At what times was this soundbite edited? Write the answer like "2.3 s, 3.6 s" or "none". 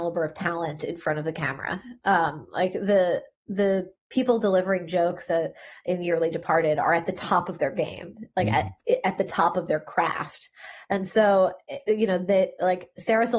4.0 s